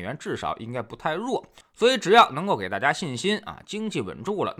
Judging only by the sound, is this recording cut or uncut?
uncut